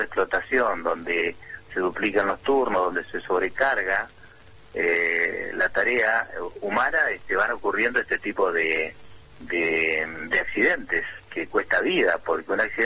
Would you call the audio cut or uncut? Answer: uncut